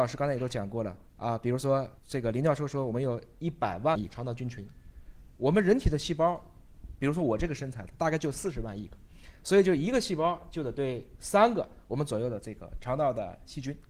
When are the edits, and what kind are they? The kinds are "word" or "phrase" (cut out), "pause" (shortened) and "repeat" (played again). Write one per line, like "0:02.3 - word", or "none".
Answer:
0:01.1 - pause
0:02.0 - pause